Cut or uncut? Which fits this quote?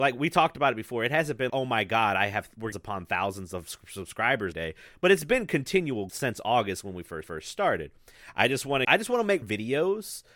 cut